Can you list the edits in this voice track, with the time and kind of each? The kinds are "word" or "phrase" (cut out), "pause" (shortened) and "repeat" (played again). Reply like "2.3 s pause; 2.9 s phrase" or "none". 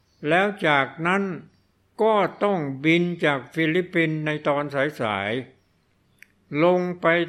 none

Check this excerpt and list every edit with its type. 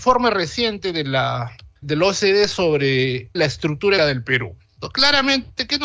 1.8 s word; 3.4 s word; 4.0 s word

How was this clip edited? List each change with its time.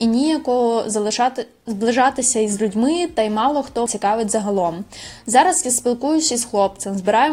3.9 s word

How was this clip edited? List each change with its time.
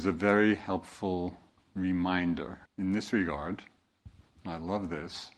2.7 s pause

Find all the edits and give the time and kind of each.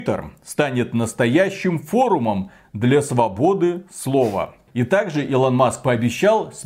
none

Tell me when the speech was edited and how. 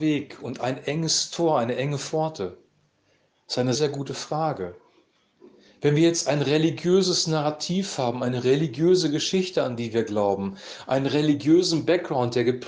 3.8 s word

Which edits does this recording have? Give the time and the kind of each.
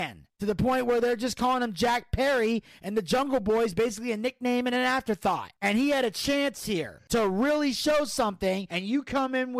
none

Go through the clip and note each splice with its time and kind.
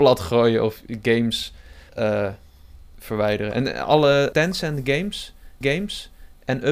1.9 s pause; 4.3 s word; 5.6 s repeat

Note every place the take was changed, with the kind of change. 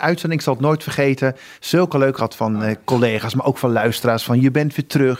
1.5 s pause; 2.2 s word

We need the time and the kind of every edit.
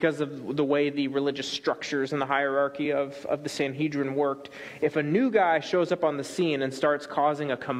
none

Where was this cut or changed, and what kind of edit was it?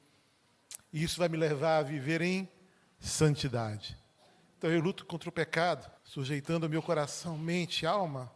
4.3 s pause; 6.0 s pause

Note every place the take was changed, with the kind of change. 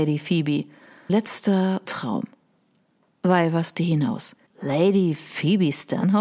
1.1 s word; 1.8 s word; 3.7 s word; 4.5 s pause

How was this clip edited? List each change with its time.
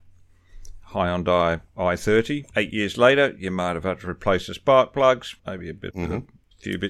5.4 s pause; 5.9 s phrase

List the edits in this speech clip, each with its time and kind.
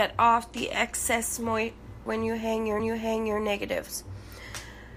2.1 s word; 2.8 s repeat

